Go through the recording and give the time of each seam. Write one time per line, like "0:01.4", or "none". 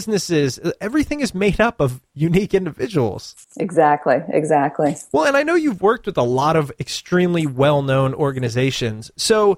0:03.4